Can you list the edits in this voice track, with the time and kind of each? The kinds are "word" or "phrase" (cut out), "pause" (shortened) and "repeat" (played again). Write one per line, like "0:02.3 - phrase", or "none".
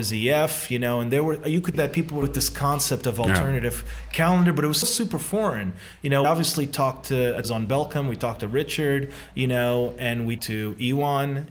0:01.7 - word
0:02.2 - phrase
0:04.8 - word
0:06.2 - word
0:07.4 - phrase
0:10.4 - word